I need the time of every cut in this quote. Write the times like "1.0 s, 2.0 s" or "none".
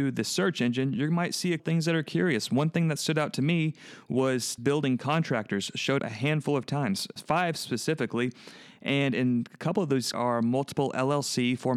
1.6 s, 4.6 s, 6.0 s, 7.2 s, 10.1 s